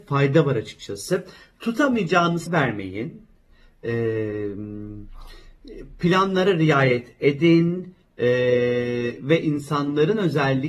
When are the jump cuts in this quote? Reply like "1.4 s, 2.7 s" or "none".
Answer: 2.5 s